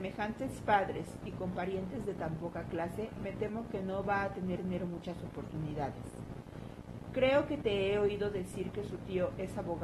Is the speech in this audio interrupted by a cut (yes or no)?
yes